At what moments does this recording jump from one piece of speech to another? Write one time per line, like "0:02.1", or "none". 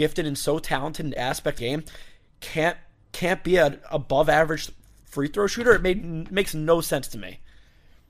0:01.2
0:01.6
0:03.0

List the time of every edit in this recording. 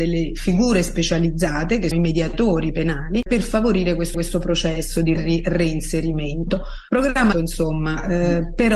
0:01.9
0:03.3
0:04.1
0:05.2
0:07.3

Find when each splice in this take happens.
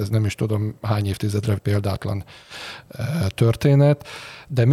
0:01.6

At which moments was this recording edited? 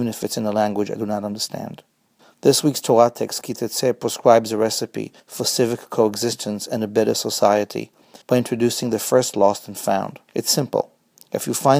0:02.2
0:05.2
0:08.2
0:10.3

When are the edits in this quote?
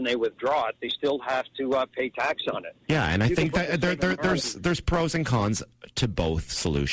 none

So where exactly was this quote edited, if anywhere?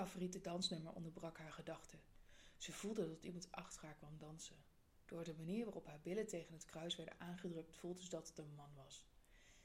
none

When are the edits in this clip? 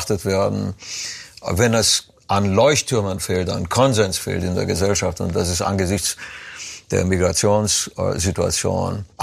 none

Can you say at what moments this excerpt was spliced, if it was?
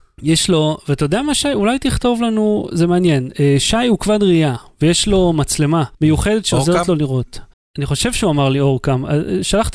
0:05.9
0:07.5

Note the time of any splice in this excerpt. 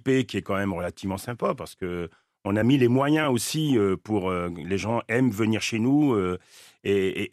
none

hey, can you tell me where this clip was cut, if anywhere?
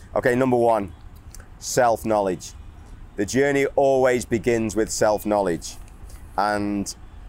none

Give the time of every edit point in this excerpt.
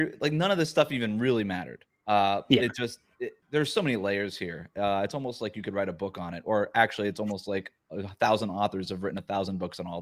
0:03.4

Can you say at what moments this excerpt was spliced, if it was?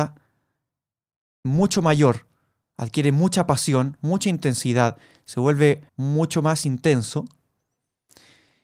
0:05.9

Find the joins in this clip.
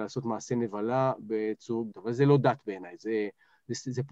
0:01.9

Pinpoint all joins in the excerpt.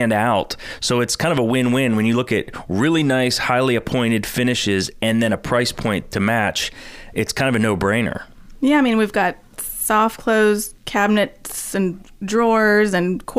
0:10.8

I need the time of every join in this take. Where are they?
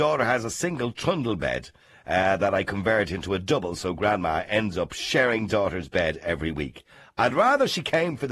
none

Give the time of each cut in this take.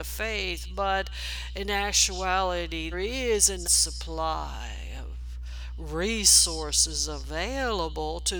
0:02.9
0:03.6

